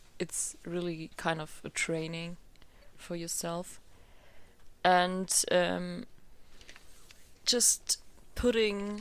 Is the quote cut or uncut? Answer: uncut